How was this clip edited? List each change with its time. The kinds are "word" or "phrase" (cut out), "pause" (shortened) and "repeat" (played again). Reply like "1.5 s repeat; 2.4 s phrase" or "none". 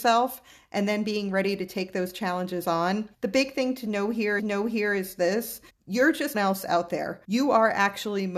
3.1 s pause; 4.4 s repeat; 5.7 s pause; 6.3 s phrase; 7.2 s pause